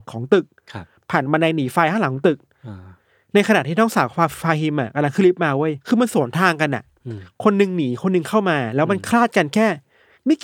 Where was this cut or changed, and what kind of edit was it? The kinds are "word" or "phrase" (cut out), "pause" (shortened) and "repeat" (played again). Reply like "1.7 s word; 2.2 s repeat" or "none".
5.8 s pause